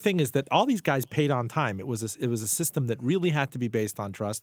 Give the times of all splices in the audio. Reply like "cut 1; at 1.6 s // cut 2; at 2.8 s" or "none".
none